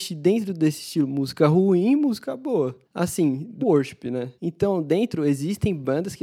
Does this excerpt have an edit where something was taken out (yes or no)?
yes